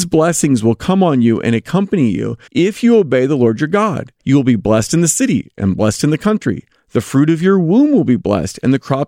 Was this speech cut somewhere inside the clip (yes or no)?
yes